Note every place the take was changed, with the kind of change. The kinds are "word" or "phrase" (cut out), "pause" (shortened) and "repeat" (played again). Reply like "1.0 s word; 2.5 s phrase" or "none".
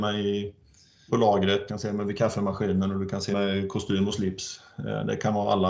1.1 s word; 1.7 s phrase; 3.3 s word